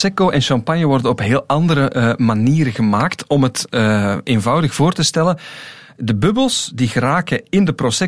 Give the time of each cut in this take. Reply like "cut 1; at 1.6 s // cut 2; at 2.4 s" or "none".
none